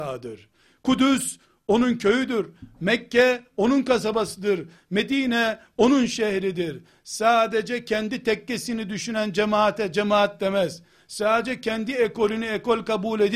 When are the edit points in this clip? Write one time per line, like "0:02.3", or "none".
none

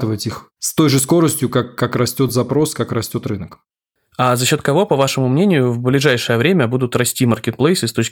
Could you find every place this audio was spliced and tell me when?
none

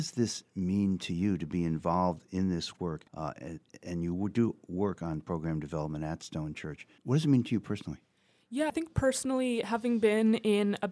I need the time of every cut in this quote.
0:03.1
0:07.0
0:08.7

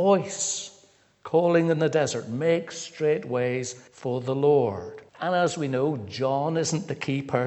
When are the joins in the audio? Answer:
0:03.9
0:05.1

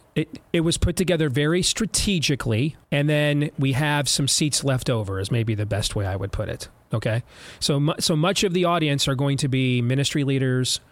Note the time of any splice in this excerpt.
0:02.8

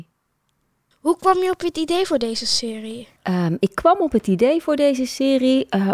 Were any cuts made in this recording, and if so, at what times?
0:03.2

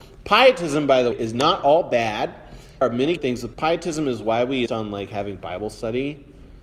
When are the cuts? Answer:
0:01.1
0:02.8
0:03.2
0:03.5
0:04.7

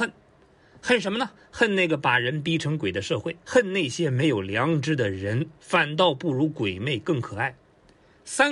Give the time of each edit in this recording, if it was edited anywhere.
0:01.4
0:03.4

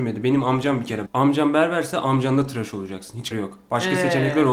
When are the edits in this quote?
0:01.1
0:03.3

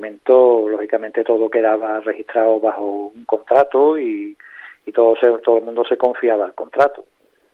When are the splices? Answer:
none

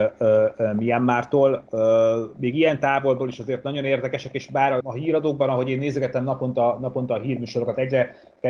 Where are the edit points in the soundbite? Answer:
0:04.8

